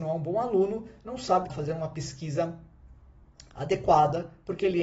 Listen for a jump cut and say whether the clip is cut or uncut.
cut